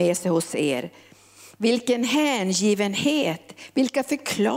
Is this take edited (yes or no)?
no